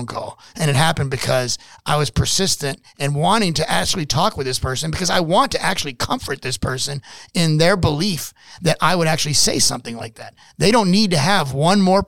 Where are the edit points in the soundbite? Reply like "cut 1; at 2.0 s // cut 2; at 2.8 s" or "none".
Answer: none